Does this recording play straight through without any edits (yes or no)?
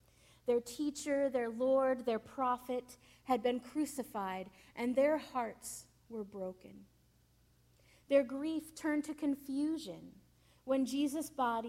yes